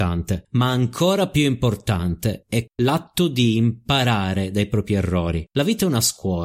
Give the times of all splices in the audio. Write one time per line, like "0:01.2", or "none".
none